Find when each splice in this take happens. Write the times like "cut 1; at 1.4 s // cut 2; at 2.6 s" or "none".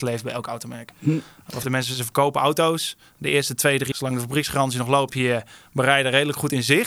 cut 1; at 1.6 s // cut 2; at 3.9 s // cut 3; at 5.1 s

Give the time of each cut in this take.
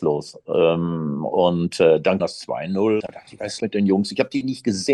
cut 1; at 2.2 s // cut 2; at 3.0 s // cut 3; at 3.6 s

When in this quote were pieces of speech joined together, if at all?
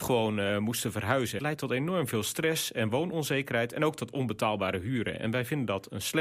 cut 1; at 1.4 s

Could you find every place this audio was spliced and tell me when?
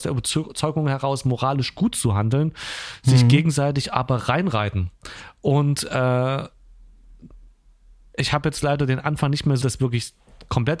cut 1; at 9.6 s

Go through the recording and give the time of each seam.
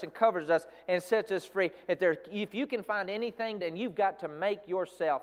cut 1; at 3.6 s

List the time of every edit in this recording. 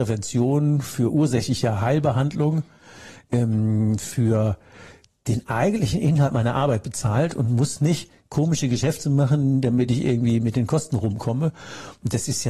none

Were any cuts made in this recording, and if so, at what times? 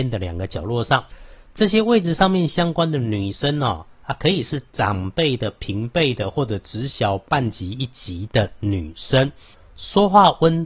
none

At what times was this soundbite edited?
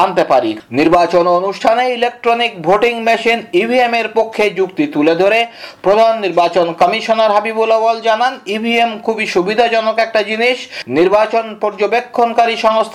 none

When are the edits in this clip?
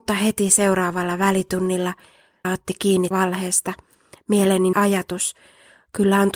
cut 1; at 2.4 s // cut 2; at 3.1 s // cut 3; at 4.7 s

